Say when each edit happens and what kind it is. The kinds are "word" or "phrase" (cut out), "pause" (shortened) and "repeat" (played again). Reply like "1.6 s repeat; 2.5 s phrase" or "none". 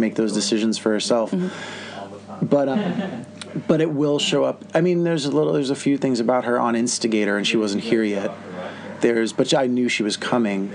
2.7 s word